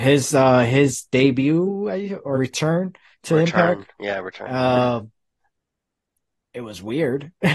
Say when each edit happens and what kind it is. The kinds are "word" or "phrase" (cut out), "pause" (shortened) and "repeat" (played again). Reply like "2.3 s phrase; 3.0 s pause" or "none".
2.3 s word